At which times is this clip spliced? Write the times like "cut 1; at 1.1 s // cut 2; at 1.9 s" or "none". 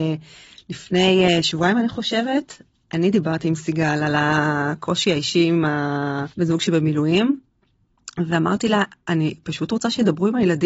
cut 1; at 6.3 s